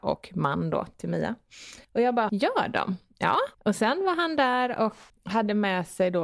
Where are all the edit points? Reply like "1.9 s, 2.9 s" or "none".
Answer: 1.8 s, 2.3 s, 3.5 s, 5.1 s